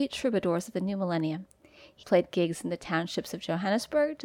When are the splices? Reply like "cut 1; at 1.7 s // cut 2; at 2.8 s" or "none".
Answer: cut 1; at 2.0 s

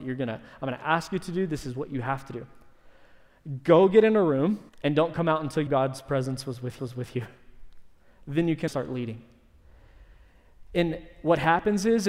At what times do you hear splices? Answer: cut 1; at 4.7 s // cut 2; at 5.7 s // cut 3; at 6.8 s // cut 4; at 8.7 s

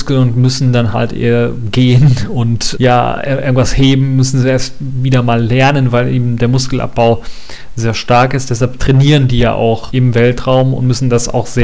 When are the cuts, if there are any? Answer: cut 1; at 2.7 s // cut 2; at 9.9 s

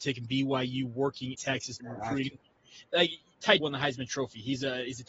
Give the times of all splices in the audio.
cut 1; at 1.3 s // cut 2; at 1.8 s // cut 3; at 3.6 s

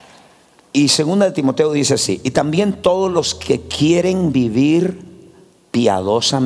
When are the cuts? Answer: none

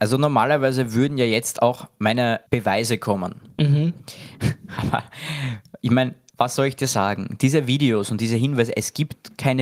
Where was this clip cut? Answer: cut 1; at 2.5 s

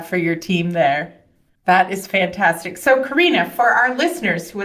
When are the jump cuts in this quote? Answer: none

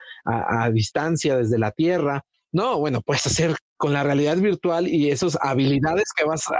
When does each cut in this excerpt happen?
none

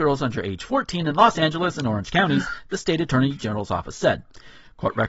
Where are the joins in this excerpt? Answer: none

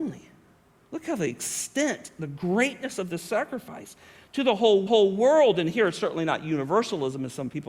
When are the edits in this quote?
cut 1; at 4.9 s

